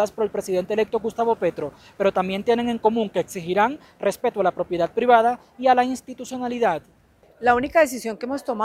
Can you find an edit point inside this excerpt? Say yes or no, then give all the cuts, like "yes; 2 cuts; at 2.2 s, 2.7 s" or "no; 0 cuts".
no; 0 cuts